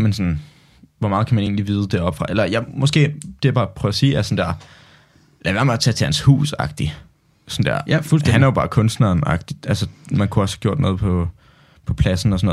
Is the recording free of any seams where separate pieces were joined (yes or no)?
yes